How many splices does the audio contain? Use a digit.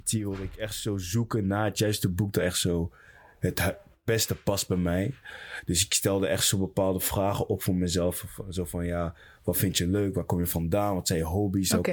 0